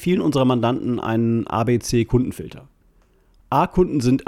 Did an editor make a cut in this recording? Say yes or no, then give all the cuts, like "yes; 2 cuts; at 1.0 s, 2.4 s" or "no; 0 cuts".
no; 0 cuts